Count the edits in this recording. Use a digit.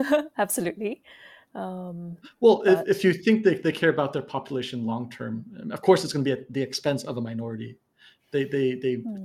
0